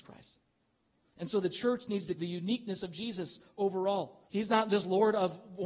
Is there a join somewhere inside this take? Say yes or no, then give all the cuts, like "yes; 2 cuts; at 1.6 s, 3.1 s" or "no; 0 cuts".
yes; 2 cuts; at 2.2 s, 4.3 s